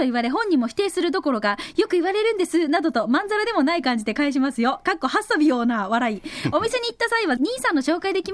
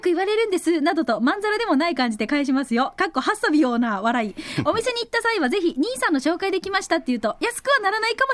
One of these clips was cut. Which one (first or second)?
first